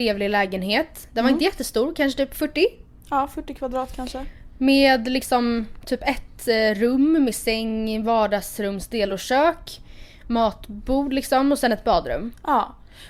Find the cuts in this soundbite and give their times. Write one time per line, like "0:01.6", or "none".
none